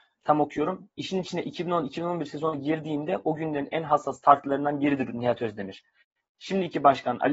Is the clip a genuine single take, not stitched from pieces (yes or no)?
yes